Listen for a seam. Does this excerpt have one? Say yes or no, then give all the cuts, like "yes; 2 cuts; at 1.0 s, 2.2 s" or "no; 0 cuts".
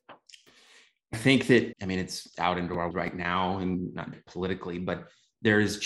yes; 5 cuts; at 1.1 s, 1.7 s, 2.3 s, 2.9 s, 4.1 s